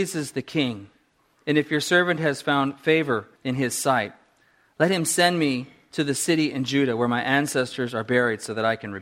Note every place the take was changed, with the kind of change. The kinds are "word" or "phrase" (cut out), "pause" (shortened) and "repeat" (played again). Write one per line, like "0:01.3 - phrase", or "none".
0:03.4 - pause

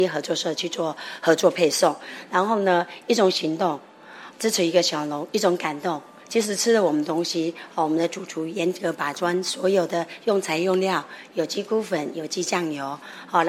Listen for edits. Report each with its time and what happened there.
0:04.3 - word

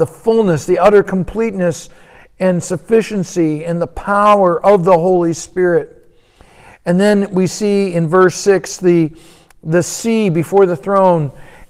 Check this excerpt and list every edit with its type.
none

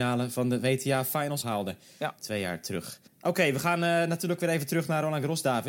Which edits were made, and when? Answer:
0:01.4 - phrase
0:03.1 - pause

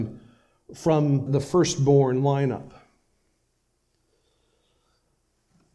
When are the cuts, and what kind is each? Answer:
0:01.3 - word

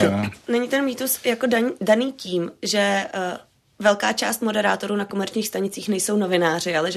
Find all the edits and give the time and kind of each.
none

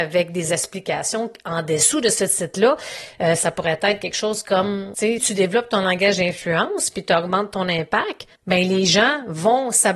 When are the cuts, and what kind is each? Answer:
0:05.2 - word
0:08.4 - pause

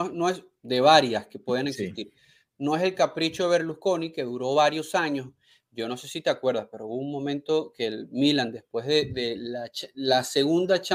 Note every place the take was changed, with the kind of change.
none

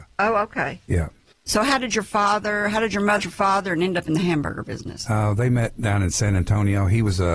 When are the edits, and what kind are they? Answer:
0:03.2 - word

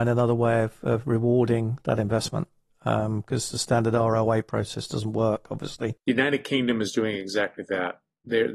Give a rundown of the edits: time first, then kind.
none

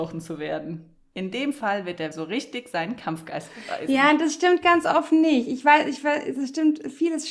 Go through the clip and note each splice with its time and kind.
0:02.1 - word

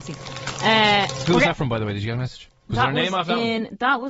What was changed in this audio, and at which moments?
0:02.6 - pause

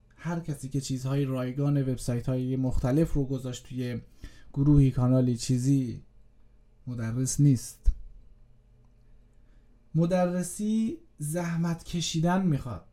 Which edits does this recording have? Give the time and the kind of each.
none

